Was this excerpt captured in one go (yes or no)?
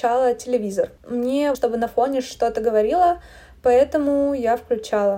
no